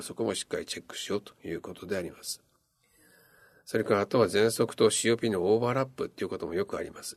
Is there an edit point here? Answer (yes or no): no